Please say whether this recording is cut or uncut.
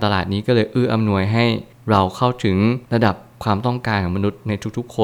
cut